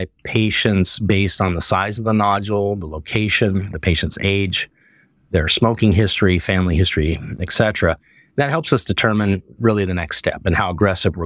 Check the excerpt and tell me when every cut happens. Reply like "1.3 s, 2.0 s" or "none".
none

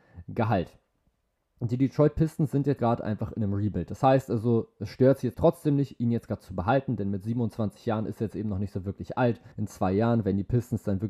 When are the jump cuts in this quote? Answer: 2.8 s, 5.3 s, 9.5 s

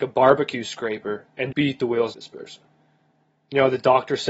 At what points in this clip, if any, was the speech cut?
1.5 s, 2.1 s

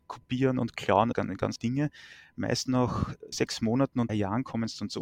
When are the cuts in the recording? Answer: 1.1 s, 1.6 s, 3.3 s, 4.1 s

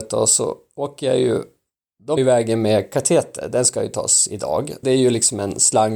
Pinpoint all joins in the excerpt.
2.2 s, 4.8 s

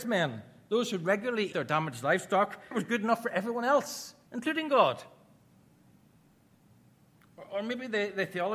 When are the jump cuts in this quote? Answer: 1.5 s, 2.7 s, 4.3 s

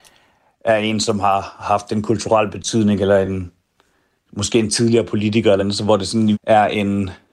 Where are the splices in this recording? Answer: 5.6 s, 6.3 s

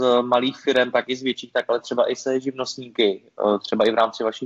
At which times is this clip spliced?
none

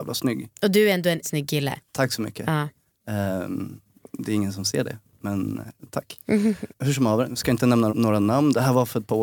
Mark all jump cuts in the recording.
1.2 s, 6.7 s, 7.9 s

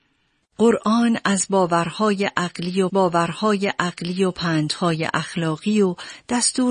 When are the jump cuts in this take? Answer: 2.9 s

